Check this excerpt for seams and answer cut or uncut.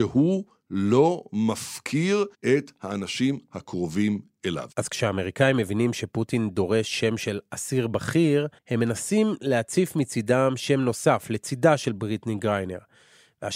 cut